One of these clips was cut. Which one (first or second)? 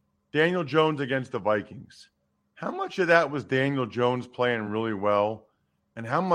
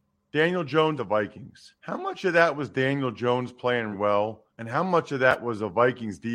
second